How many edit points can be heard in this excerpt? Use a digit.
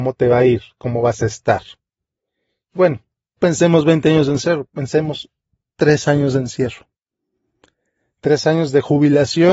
1